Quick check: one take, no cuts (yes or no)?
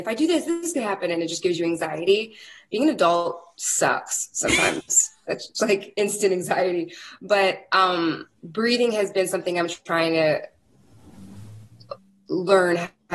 no